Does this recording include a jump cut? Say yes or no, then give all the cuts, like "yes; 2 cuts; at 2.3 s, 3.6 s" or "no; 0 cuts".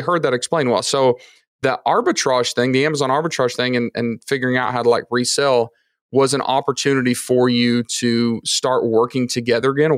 no; 0 cuts